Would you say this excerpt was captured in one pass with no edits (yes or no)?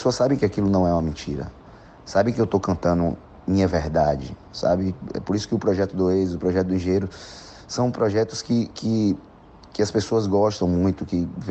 yes